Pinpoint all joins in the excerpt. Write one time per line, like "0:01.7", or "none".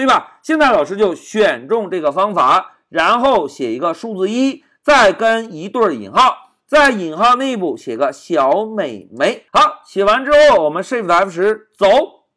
0:09.5